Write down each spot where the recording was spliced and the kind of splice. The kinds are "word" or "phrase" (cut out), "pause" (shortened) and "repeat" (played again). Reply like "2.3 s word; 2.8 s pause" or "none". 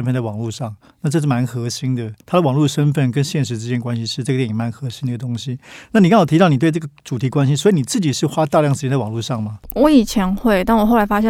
2.2 s pause